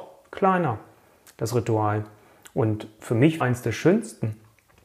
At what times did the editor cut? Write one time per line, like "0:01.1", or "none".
0:03.4